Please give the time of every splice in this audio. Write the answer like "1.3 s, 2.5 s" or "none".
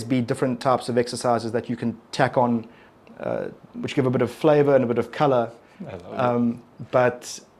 none